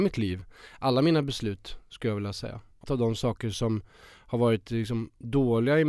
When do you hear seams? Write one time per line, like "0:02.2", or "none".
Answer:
0:02.8